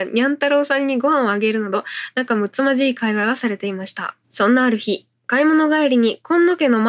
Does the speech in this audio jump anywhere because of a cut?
yes; 1 cut; at 4.2 s

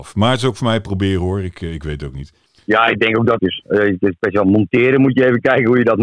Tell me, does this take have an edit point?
yes; 2 cuts; at 2.5 s, 3.4 s

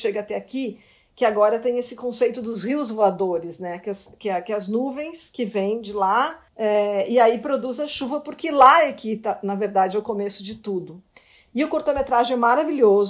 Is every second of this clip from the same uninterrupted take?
no; 1 cut; at 6.5 s

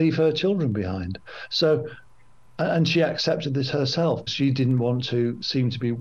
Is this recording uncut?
no; 1 cut; at 4.3 s

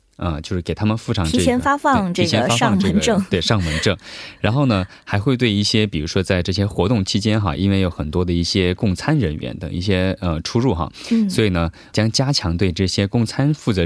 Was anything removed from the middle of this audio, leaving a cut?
yes; 1 cut; at 11.9 s

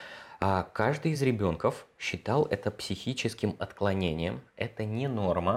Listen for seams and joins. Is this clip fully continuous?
yes; 0 cuts

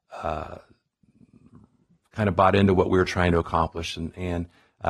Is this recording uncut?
yes; 0 cuts

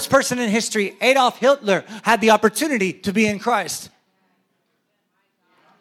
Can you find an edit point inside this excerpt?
no; 0 cuts

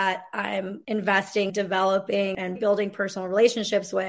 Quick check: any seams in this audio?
yes; 2 cuts; at 1.5 s, 2.6 s

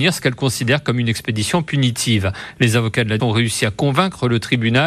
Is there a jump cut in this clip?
yes; 1 cut; at 3.2 s

